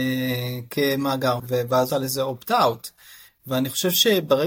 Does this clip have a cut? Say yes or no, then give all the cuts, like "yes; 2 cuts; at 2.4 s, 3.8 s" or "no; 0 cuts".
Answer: yes; 2 cuts; at 1.4 s, 1.9 s